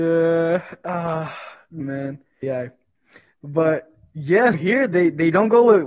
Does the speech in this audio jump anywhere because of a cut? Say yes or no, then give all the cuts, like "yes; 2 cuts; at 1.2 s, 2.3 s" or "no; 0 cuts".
yes; 3 cuts; at 1.8 s, 2.4 s, 4.5 s